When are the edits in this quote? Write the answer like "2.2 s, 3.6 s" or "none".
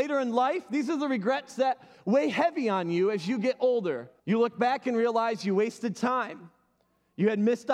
4.2 s